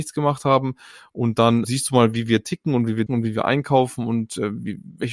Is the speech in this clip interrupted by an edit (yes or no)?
yes